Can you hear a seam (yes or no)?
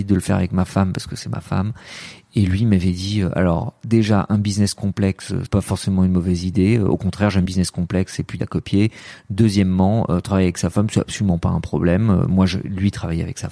yes